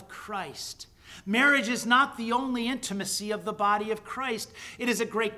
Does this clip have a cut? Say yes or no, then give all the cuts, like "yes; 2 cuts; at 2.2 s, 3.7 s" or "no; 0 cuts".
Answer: no; 0 cuts